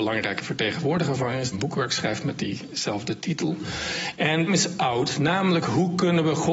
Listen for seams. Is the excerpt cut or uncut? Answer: cut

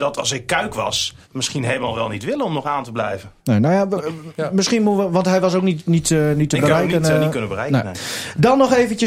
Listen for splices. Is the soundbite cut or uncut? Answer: cut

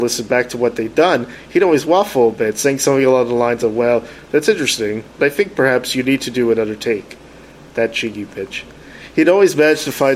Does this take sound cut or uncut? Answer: uncut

